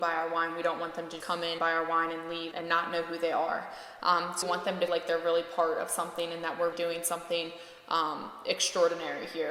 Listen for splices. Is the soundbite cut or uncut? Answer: cut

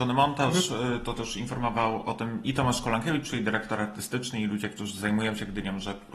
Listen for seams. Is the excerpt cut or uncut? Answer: uncut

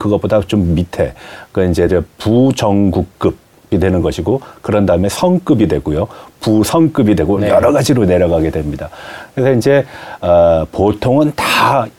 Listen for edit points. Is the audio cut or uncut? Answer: uncut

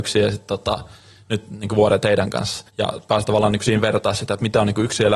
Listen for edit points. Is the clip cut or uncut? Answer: cut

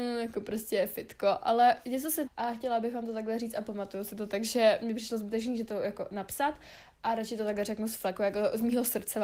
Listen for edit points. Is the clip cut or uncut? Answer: cut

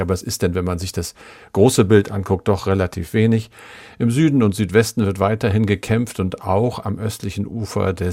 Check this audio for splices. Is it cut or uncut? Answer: uncut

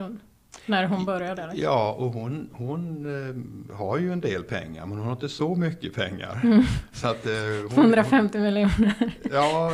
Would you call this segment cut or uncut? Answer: uncut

